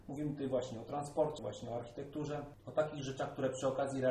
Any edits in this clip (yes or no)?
yes